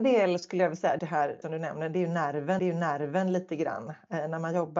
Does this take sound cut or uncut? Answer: cut